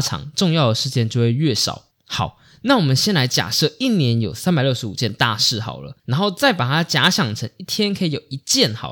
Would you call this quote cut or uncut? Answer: cut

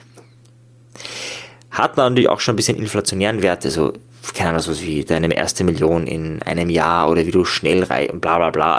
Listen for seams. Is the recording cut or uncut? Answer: uncut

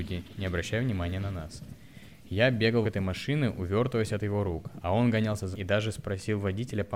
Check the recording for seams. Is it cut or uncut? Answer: cut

